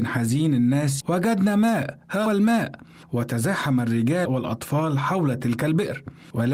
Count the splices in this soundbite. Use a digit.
3